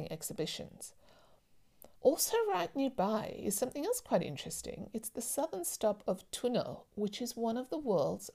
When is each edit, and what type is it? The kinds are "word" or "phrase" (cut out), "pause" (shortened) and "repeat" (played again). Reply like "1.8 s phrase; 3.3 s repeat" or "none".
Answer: 2.0 s pause